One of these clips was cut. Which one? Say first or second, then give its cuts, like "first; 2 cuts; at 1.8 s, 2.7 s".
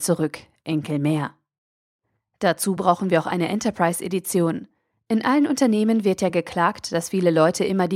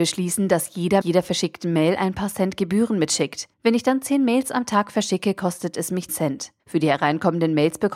second; 4 cuts; at 1.0 s, 3.5 s, 6.1 s, 6.6 s